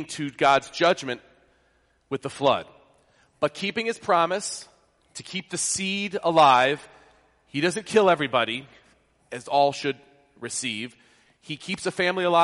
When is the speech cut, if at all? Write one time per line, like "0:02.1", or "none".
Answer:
none